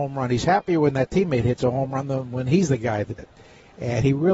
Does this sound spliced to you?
yes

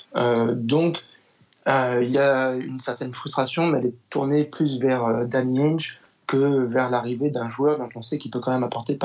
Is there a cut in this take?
no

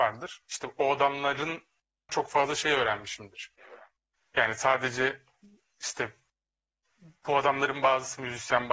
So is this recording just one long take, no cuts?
no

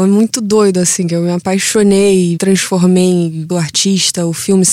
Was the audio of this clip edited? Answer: yes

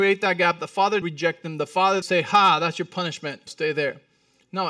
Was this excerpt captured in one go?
no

